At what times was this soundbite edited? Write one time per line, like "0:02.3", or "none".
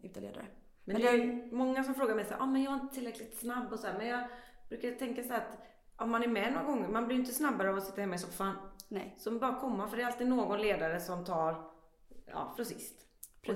0:12.6